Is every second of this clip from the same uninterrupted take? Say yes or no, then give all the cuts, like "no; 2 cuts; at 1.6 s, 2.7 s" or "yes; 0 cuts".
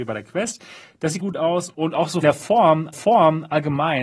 no; 3 cuts; at 1.2 s, 2.2 s, 2.9 s